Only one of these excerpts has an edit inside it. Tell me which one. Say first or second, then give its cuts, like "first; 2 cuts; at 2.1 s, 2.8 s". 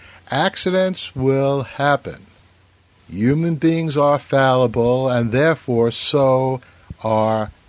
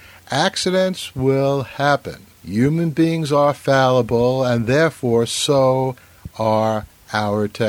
second; 1 cut; at 2.3 s